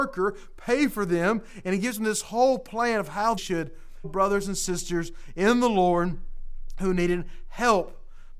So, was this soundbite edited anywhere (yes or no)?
yes